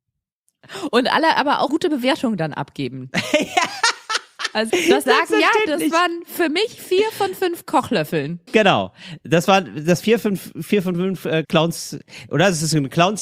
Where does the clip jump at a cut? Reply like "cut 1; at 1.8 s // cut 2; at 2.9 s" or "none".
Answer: cut 1; at 1.7 s // cut 2; at 4.7 s // cut 3; at 5.1 s // cut 4; at 8.5 s // cut 5; at 10.0 s // cut 6; at 11.4 s

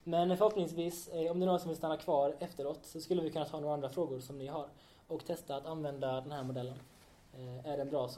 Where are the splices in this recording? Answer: none

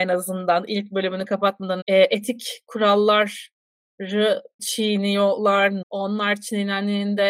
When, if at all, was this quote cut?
cut 1; at 1.8 s // cut 2; at 4.6 s // cut 3; at 5.8 s

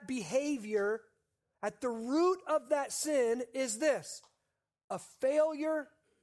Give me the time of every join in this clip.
none

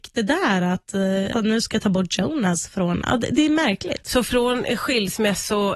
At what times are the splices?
cut 1; at 1.3 s

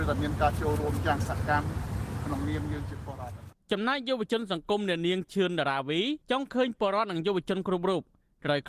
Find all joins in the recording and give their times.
cut 1; at 6.2 s

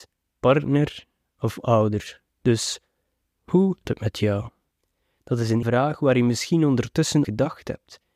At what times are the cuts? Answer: cut 1; at 2.3 s // cut 2; at 3.8 s // cut 3; at 4.7 s // cut 4; at 5.6 s // cut 5; at 7.2 s

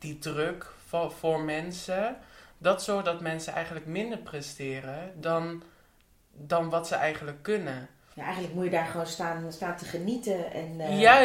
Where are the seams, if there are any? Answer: none

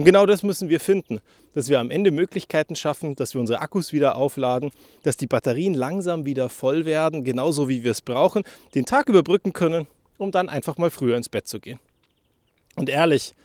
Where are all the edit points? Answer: none

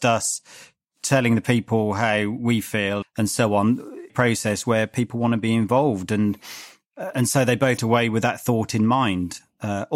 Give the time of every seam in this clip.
cut 1; at 3.0 s // cut 2; at 4.1 s // cut 3; at 7.1 s // cut 4; at 7.8 s

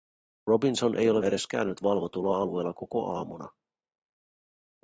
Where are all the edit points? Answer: cut 1; at 1.2 s

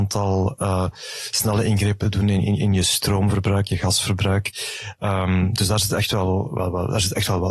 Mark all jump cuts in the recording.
none

